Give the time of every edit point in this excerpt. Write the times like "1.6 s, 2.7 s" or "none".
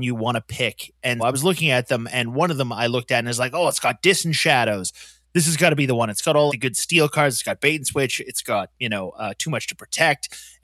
1.2 s, 6.5 s